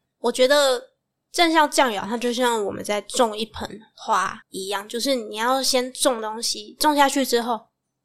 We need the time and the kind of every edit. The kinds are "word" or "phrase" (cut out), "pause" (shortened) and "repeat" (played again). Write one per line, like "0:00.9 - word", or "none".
0:04.4 - pause